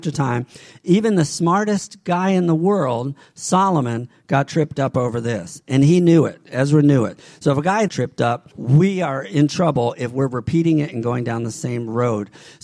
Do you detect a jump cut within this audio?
yes; 2 cuts; at 7.9 s, 8.5 s

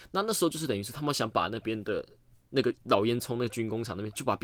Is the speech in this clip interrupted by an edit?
no; 0 cuts

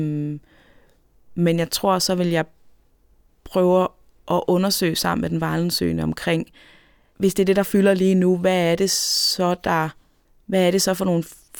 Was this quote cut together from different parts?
no; 0 cuts

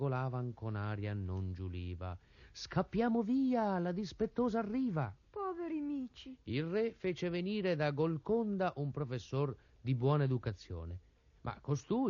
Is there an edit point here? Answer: no; 0 cuts

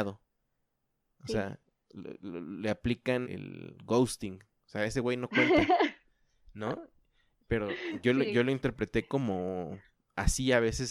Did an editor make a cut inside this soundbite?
yes; 1 cut; at 3.2 s

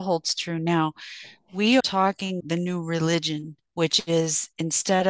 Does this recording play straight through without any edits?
no; 3 cuts; at 1.8 s, 2.4 s, 3.7 s

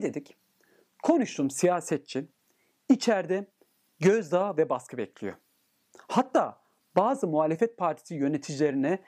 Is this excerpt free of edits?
yes; 0 cuts

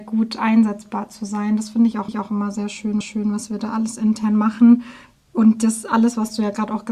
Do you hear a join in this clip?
yes; 2 cuts; at 2.1 s, 3.0 s

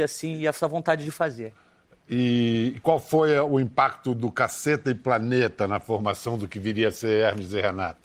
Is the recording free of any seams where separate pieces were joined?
yes; 0 cuts

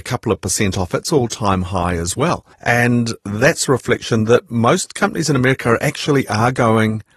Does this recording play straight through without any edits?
no; 1 cut; at 2.5 s

